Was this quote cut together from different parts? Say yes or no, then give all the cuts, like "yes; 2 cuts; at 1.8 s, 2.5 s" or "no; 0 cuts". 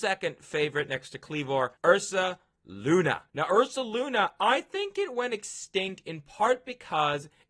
yes; 2 cuts; at 1.8 s, 3.3 s